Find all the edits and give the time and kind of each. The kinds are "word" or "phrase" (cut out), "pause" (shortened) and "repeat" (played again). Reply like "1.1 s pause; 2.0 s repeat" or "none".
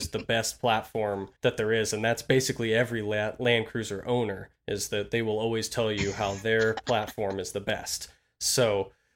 1.4 s pause; 4.6 s pause